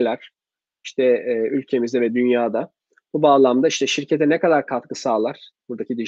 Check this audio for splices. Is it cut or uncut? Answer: uncut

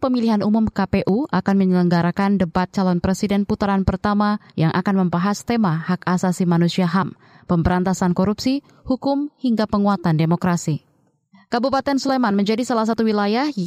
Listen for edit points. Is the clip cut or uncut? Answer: uncut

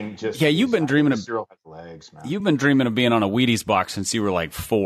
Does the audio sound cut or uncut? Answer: uncut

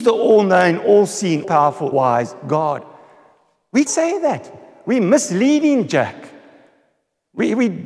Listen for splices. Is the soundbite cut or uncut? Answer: cut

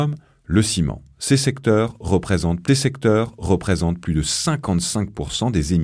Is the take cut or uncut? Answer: cut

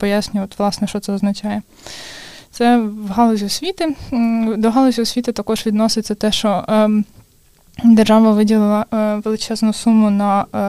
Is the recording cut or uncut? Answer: uncut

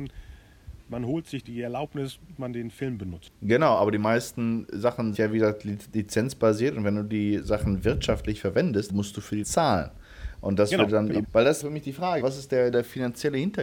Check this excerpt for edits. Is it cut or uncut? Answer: cut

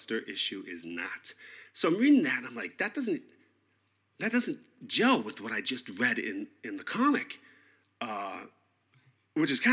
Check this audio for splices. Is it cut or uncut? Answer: uncut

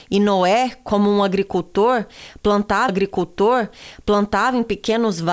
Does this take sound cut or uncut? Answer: cut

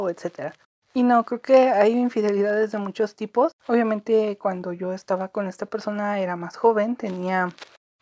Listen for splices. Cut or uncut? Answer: cut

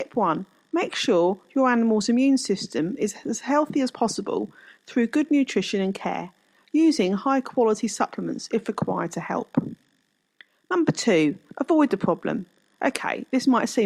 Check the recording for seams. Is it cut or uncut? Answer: uncut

